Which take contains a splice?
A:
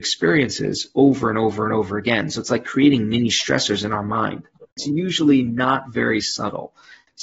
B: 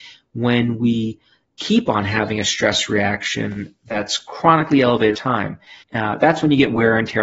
B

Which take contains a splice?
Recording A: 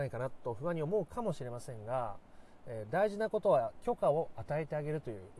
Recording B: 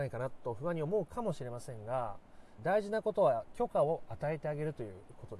B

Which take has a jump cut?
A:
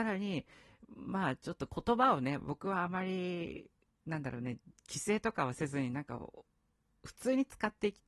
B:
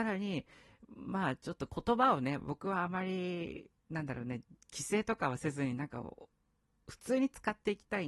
B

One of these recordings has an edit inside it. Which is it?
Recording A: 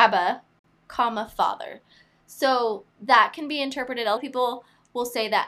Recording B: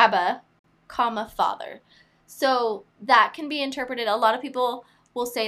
A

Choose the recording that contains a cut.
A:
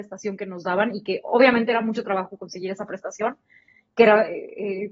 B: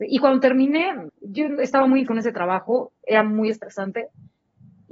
B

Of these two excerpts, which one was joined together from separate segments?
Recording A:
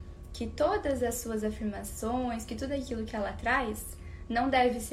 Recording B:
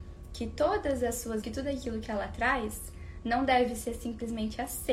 B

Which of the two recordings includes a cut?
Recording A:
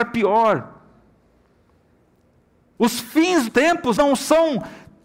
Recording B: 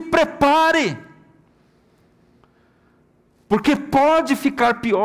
A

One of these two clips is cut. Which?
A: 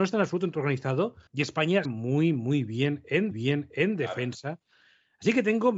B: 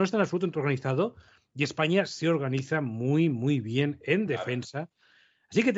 A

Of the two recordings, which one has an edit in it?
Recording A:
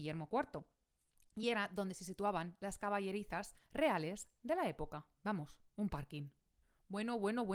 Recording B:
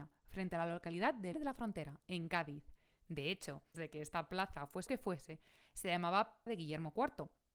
B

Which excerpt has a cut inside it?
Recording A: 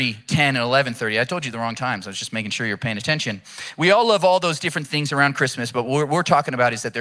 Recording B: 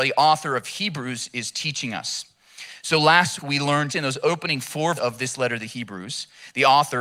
B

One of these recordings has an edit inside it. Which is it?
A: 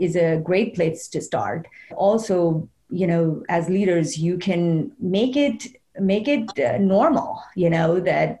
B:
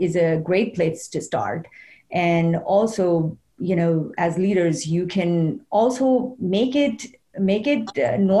A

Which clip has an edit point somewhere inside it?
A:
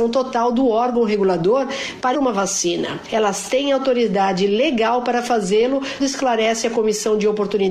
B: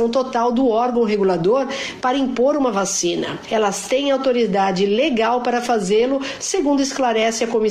A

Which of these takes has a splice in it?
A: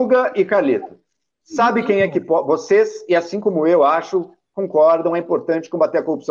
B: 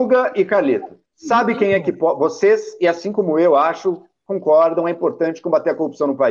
B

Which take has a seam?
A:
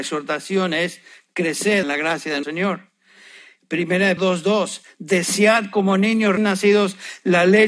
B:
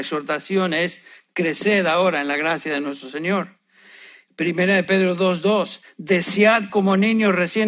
A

